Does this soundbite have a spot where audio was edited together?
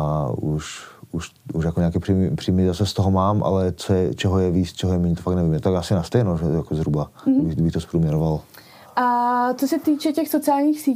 no; 0 cuts

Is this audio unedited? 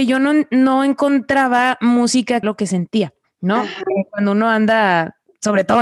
no; 2 cuts; at 2.4 s, 3.2 s

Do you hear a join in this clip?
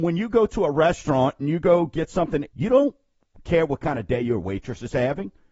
yes; 1 cut; at 2.5 s

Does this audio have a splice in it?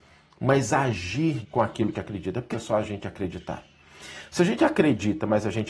yes; 3 cuts; at 1.4 s, 1.9 s, 2.5 s

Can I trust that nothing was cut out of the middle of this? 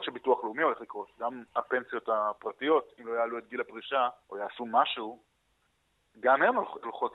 no; 1 cut; at 4.2 s

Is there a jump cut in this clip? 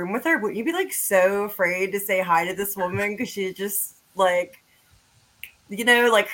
no; 0 cuts

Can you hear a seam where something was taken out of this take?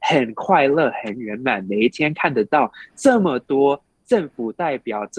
no; 0 cuts

